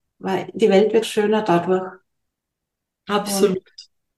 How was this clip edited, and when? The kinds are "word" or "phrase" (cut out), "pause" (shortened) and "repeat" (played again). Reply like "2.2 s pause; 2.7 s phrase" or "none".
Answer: 1.0 s word